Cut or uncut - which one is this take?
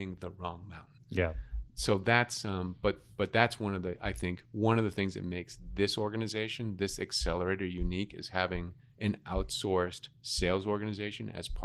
cut